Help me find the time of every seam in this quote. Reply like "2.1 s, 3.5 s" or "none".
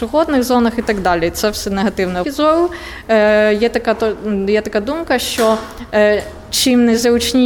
2.2 s